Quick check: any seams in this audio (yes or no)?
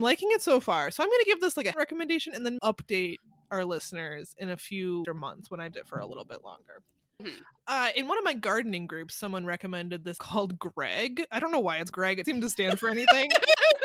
yes